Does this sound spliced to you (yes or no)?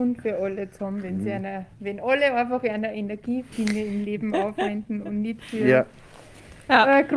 yes